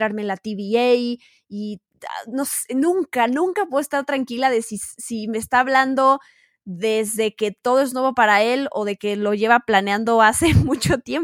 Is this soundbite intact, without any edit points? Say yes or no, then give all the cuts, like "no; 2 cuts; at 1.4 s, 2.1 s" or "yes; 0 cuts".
yes; 0 cuts